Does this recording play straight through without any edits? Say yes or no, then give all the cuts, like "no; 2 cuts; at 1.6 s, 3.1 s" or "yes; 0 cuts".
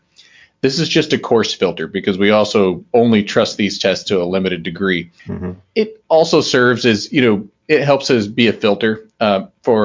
no; 1 cut; at 5.2 s